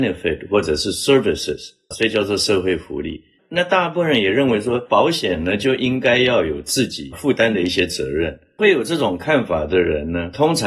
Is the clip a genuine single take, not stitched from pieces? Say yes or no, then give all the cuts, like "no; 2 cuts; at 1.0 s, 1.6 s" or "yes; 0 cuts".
yes; 0 cuts